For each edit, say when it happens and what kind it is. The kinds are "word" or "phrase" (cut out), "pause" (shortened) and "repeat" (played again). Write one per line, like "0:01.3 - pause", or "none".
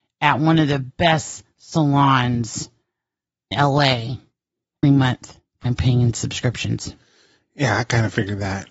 0:03.5 - word
0:04.8 - word
0:05.6 - word